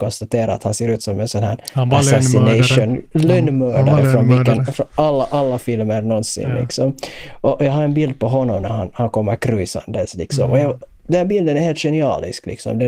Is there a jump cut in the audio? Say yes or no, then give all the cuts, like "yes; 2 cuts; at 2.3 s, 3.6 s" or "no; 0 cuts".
no; 0 cuts